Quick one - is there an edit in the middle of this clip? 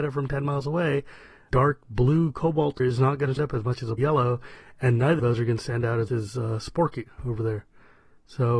yes; 6 cuts; at 1.5 s, 2.8 s, 3.4 s, 4.0 s, 5.2 s, 6.1 s

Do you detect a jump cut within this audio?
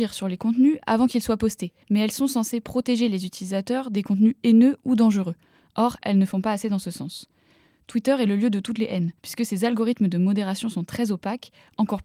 yes; 2 cuts; at 1.8 s, 9.2 s

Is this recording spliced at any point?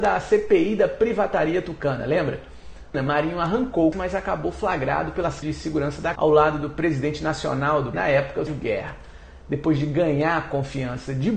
yes; 6 cuts; at 2.9 s, 3.9 s, 5.4 s, 6.2 s, 7.9 s, 8.5 s

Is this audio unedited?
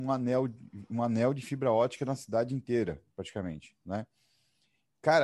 no; 1 cut; at 3.1 s

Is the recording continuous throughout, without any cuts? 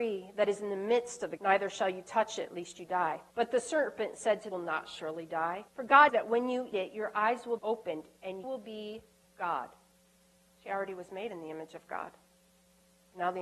no; 9 cuts; at 1.4 s, 3.3 s, 4.5 s, 5.7 s, 6.1 s, 6.7 s, 7.6 s, 8.4 s, 9.2 s

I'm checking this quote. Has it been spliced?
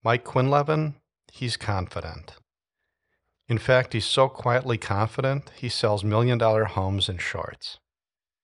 no; 0 cuts

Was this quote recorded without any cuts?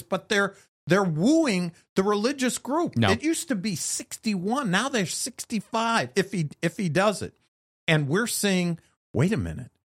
yes; 0 cuts

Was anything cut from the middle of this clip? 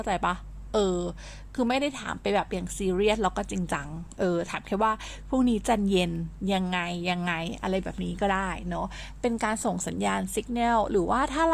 no; 0 cuts

